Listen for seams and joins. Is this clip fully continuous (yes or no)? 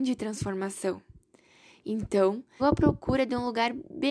no